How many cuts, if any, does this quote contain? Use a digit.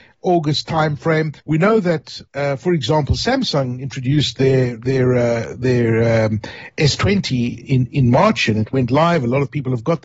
3